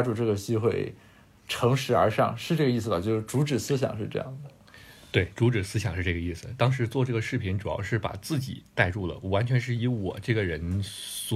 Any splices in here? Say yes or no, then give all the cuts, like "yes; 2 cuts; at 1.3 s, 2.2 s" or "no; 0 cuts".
no; 0 cuts